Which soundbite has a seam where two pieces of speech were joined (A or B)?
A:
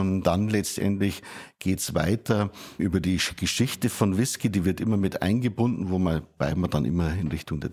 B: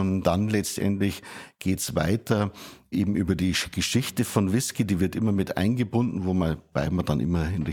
A